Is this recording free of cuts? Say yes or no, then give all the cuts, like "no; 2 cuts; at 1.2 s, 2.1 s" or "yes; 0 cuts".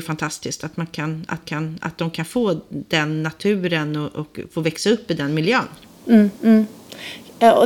no; 1 cut; at 1.4 s